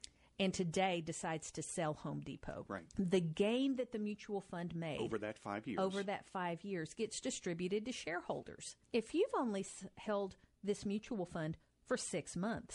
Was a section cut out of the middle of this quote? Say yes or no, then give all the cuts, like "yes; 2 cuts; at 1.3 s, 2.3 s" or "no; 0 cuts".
yes; 2 cuts; at 2.9 s, 8.8 s